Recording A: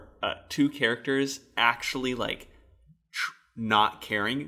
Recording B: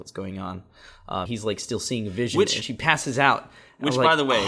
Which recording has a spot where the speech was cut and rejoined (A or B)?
B